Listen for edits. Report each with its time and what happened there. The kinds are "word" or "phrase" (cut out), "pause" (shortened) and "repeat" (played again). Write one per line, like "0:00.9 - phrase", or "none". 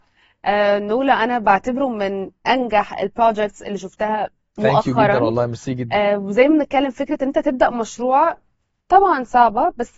none

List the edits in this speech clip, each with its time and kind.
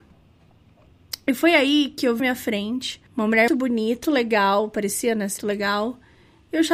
0:02.2 - phrase
0:03.1 - pause
0:03.5 - word
0:04.0 - word
0:05.4 - word

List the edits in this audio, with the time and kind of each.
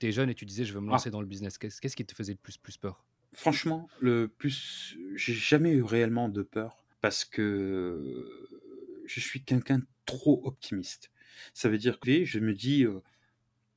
0:02.6 - repeat
0:06.9 - pause
0:12.0 - word

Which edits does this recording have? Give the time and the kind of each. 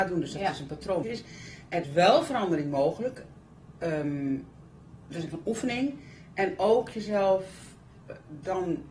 0:01.0 - phrase
0:01.8 - word
0:05.3 - word

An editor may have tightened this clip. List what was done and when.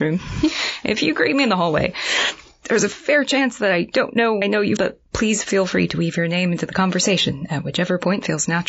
0:04.4 - word
0:04.8 - word

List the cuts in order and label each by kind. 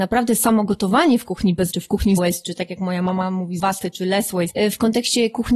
0:01.7 - word
0:02.2 - word
0:03.6 - word

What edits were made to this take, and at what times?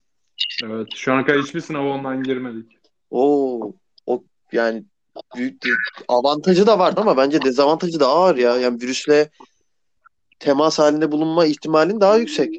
0:04.1 - word
0:07.0 - phrase

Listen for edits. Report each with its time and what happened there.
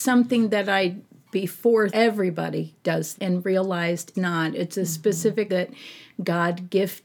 0:01.9 - word
0:03.2 - word
0:04.1 - word
0:05.5 - word

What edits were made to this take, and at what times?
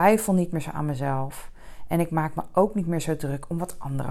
none

